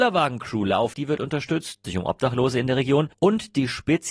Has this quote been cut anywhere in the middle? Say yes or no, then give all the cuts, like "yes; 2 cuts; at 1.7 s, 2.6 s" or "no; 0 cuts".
yes; 3 cuts; at 0.9 s, 1.8 s, 3.1 s